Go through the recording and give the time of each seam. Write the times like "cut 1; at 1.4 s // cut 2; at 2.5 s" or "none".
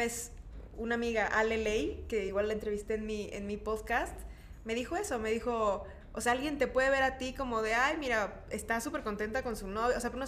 none